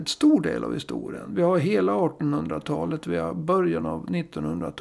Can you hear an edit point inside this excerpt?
no; 0 cuts

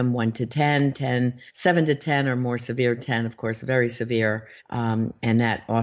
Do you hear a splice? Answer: yes; 2 cuts; at 1.5 s, 4.6 s

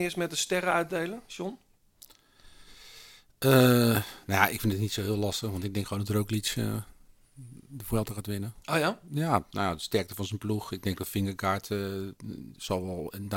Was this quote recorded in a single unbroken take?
yes; 0 cuts

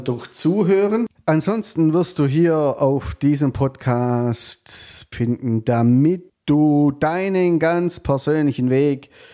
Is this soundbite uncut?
no; 3 cuts; at 1.1 s, 5.1 s, 6.3 s

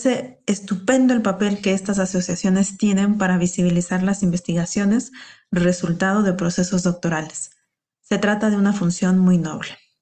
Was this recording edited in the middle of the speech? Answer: no; 0 cuts

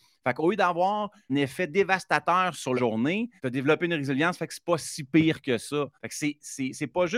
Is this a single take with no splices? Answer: no; 4 cuts; at 1.3 s, 2.8 s, 3.4 s, 5.9 s

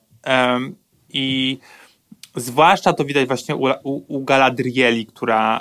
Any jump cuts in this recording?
no; 0 cuts

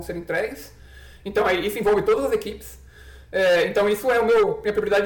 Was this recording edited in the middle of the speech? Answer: no; 0 cuts

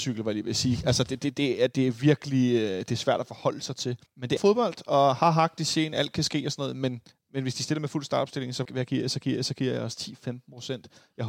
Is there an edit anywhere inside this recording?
yes; 5 cuts; at 4.1 s, 4.4 s, 7.1 s, 8.6 s, 9.2 s

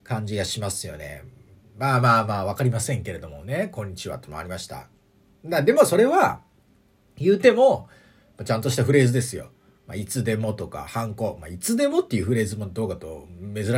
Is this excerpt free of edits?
yes; 0 cuts

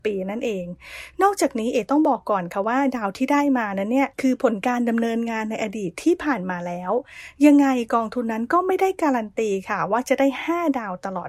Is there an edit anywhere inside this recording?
yes; 1 cut; at 4.1 s

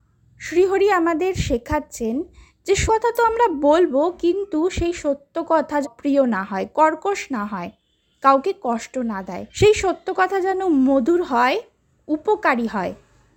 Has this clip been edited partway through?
yes; 3 cuts; at 2.9 s, 5.8 s, 9.5 s

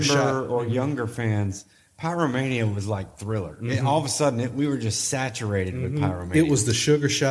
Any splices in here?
no; 0 cuts

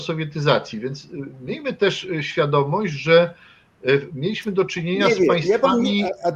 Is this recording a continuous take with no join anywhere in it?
yes; 0 cuts

